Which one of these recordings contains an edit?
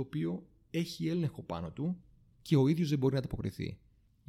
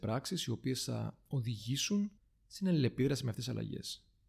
second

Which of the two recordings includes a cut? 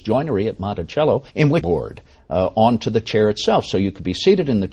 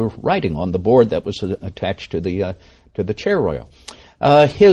first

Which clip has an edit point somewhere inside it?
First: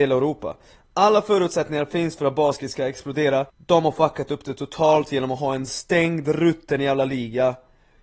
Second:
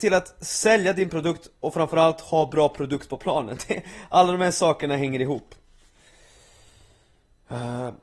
first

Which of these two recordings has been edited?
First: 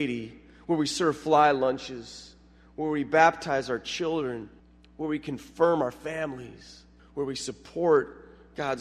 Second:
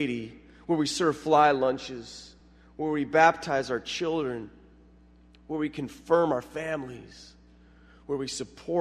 first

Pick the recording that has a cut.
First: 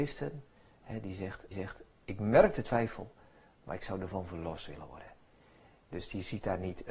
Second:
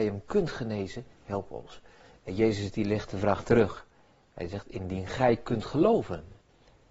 first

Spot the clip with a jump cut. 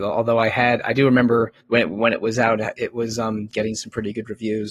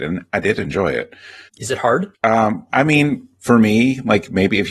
first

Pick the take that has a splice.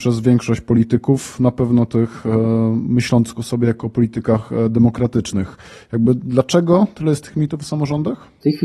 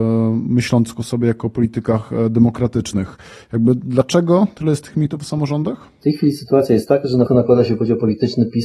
second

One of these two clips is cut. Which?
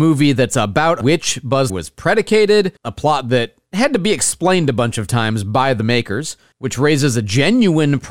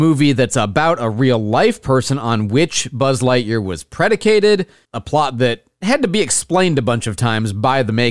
first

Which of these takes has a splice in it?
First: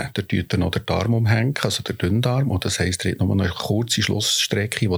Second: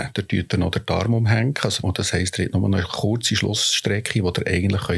second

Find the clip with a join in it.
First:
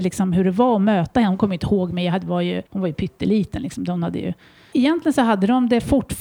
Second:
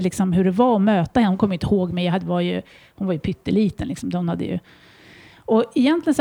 first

